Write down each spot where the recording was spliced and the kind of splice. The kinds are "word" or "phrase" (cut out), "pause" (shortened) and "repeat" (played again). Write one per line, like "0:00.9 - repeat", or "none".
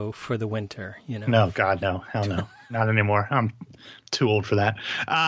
none